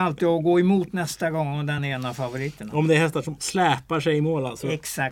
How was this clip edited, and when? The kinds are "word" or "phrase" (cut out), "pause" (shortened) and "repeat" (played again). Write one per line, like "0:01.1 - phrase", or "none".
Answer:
none